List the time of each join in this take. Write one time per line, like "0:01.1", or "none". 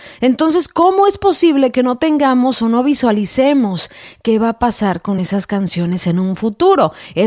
none